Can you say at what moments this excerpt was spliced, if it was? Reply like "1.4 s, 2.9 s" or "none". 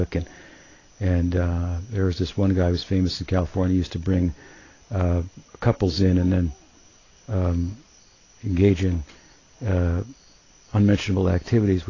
none

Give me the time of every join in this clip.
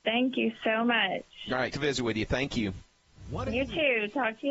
1.7 s

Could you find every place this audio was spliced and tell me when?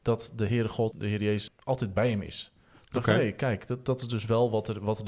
0.9 s, 1.5 s

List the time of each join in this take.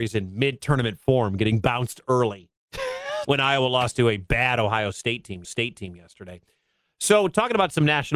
3.2 s, 5.4 s

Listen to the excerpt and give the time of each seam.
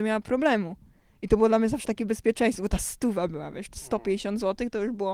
none

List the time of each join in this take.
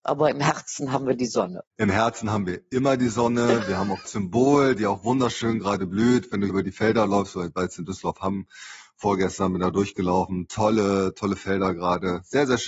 1.7 s, 4.0 s, 6.5 s

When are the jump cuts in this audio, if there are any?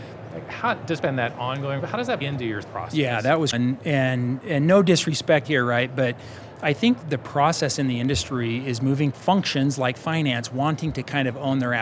1.0 s, 1.8 s, 2.2 s, 2.6 s, 3.5 s, 5.4 s, 7.0 s, 9.1 s

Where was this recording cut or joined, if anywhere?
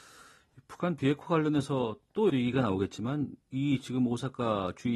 2.3 s, 3.4 s

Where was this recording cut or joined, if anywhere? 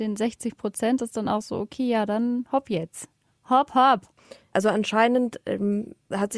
none

